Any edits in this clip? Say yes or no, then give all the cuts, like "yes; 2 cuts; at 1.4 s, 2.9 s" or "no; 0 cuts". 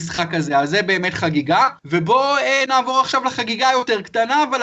yes; 1 cut; at 1.8 s